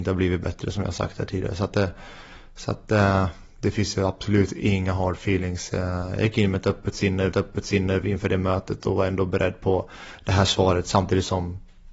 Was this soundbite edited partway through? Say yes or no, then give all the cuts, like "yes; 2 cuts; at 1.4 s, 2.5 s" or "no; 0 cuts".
yes; 1 cut; at 7.3 s